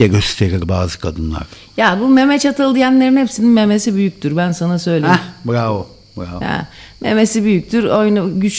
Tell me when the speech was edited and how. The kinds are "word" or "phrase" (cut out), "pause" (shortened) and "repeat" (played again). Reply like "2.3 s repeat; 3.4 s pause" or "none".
none